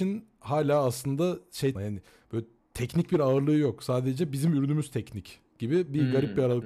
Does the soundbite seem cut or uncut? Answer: cut